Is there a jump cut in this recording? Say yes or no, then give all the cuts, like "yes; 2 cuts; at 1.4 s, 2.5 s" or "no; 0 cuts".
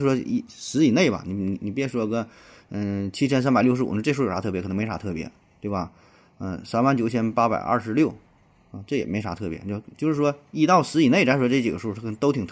no; 0 cuts